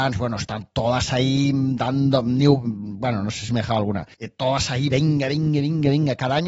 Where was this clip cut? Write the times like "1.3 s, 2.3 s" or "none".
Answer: 4.1 s

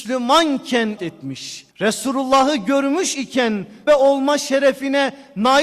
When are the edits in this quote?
1.0 s, 1.7 s, 3.9 s

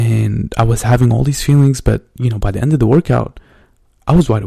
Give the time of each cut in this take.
none

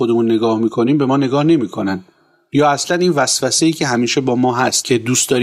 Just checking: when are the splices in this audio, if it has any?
none

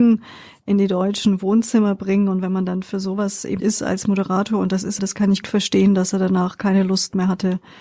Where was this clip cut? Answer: 3.6 s, 5.0 s, 5.4 s

